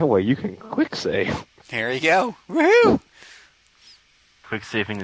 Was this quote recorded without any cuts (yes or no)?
yes